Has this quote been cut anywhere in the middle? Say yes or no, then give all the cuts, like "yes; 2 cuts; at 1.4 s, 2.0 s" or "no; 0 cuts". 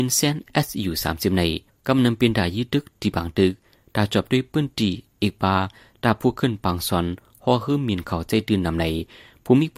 no; 0 cuts